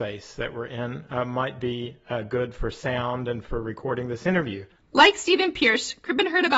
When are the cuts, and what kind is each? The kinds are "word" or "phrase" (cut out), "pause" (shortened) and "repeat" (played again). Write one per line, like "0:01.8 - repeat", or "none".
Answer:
none